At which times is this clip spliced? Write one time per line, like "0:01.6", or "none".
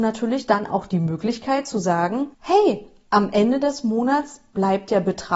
0:02.3